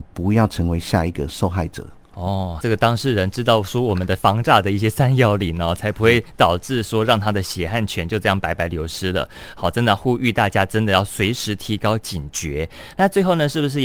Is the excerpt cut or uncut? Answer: cut